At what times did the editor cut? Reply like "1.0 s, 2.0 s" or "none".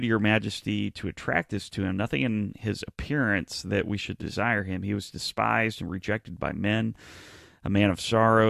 none

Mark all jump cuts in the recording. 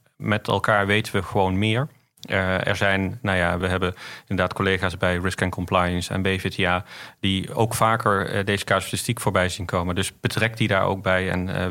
3.6 s

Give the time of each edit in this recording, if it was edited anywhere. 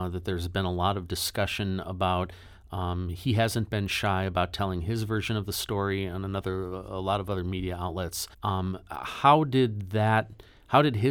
8.3 s

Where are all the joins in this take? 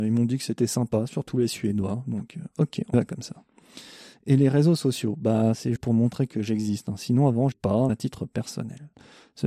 2.9 s, 5.8 s, 7.5 s, 7.9 s

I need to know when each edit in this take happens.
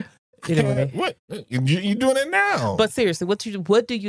none

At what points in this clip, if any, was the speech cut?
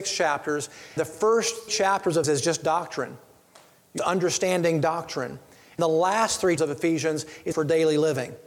1.0 s, 1.7 s, 2.2 s, 4.0 s, 5.8 s, 6.6 s, 7.5 s

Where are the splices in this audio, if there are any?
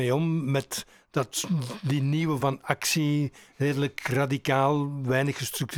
2.4 s

